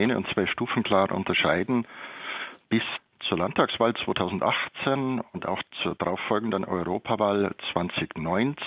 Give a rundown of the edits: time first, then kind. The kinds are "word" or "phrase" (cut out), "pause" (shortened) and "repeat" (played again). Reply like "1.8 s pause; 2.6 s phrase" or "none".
none